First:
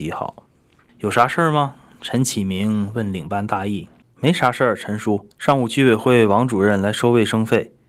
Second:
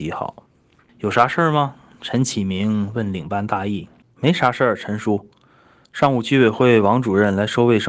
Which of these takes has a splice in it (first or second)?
first